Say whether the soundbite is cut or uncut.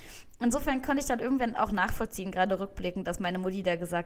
uncut